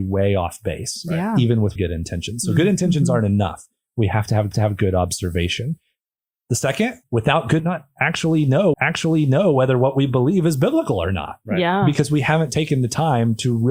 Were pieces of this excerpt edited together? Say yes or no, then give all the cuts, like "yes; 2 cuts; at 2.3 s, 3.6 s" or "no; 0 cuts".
yes; 5 cuts; at 1.8 s, 4.5 s, 7.0 s, 7.6 s, 8.7 s